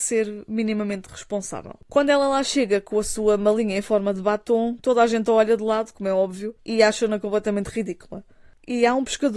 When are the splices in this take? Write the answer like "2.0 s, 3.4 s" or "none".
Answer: 1.8 s, 6.6 s